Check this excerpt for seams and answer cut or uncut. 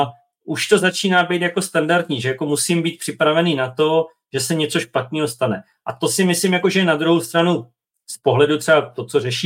uncut